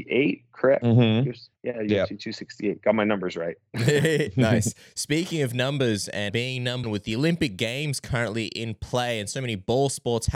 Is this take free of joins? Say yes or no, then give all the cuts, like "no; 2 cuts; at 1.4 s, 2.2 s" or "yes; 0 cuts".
no; 3 cuts; at 1.5 s, 6.3 s, 6.8 s